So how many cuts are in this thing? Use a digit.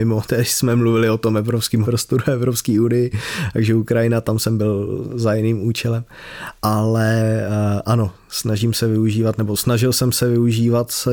1